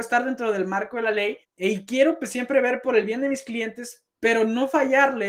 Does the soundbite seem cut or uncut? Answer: cut